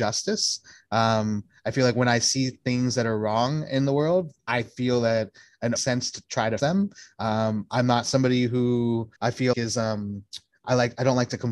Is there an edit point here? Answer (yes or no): yes